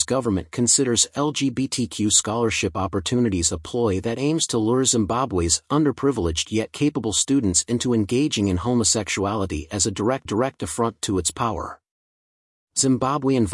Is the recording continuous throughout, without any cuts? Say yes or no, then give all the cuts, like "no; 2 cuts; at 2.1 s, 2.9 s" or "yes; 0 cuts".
no; 1 cut; at 10.3 s